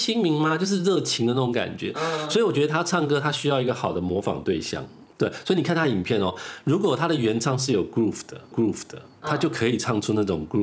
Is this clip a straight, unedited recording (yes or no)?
no